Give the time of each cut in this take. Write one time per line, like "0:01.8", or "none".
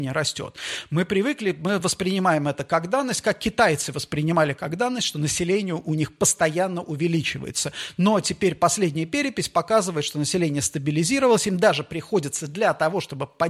none